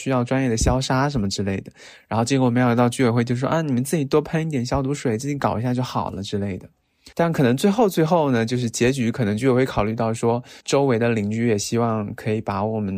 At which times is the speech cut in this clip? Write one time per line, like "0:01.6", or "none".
0:07.1
0:10.6